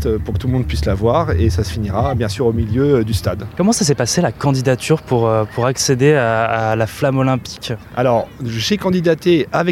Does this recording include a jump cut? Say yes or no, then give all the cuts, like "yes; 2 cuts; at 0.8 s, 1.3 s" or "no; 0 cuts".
no; 0 cuts